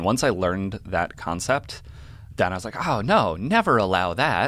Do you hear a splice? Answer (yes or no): no